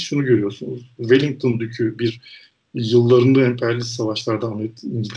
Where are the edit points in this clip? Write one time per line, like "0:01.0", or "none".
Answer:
0:02.0

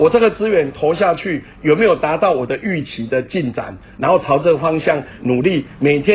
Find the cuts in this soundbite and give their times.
none

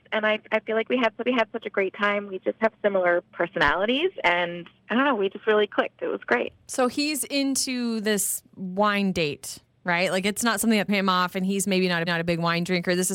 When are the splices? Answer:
0:01.3
0:03.3
0:10.9
0:12.1

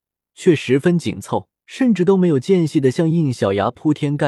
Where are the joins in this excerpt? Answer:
0:01.6

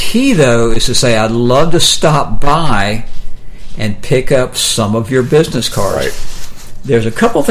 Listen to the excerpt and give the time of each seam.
none

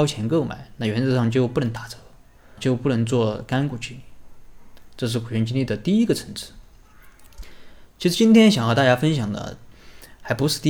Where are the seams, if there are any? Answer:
0:02.6

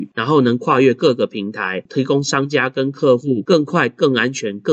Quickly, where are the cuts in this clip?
none

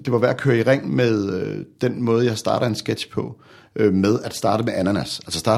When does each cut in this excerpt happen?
none

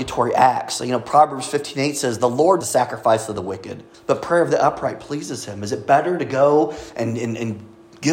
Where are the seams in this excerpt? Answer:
0:02.6
0:03.9

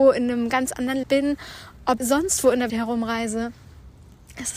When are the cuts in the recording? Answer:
0:01.0
0:02.0
0:02.7

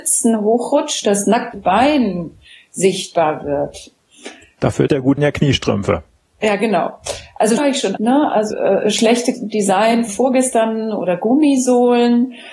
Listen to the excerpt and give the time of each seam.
0:01.0
0:01.5
0:04.9
0:05.2
0:07.6
0:08.0
0:08.5
0:09.3
0:10.1

